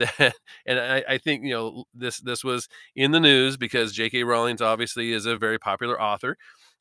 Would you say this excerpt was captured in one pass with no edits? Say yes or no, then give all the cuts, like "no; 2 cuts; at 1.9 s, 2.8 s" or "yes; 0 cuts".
yes; 0 cuts